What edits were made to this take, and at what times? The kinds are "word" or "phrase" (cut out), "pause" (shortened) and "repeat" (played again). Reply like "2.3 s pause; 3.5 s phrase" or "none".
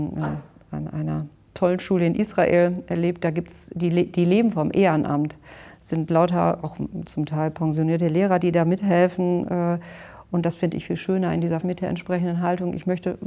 11.6 s word

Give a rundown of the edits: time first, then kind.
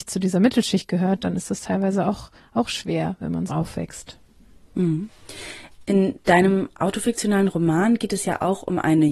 3.5 s word

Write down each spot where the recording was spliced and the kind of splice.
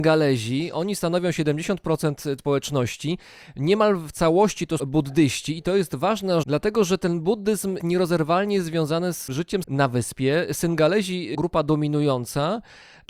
2.4 s word; 4.8 s word; 6.4 s word; 7.8 s word; 9.6 s word; 11.3 s word

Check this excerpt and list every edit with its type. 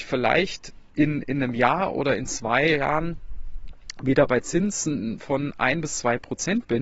none

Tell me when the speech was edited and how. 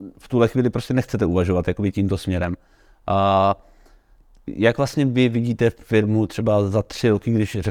none

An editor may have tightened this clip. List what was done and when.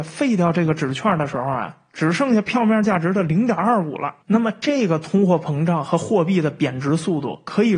4.2 s pause

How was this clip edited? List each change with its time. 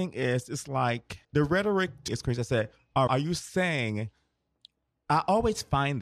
1.2 s pause; 2.1 s word; 3.1 s phrase

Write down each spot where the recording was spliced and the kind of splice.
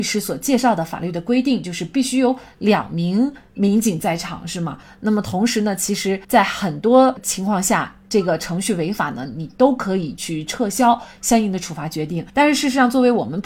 6.2 s pause; 12.3 s pause

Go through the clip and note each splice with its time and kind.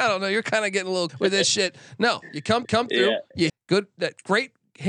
1.1 s word; 2.6 s repeat; 3.5 s word

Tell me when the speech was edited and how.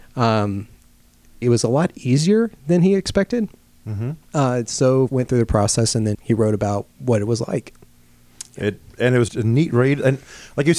1.4 s phrase; 4.2 s pause; 5.1 s word; 6.1 s word; 9.3 s word

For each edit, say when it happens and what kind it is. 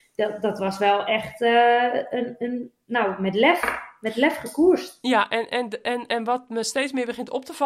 none

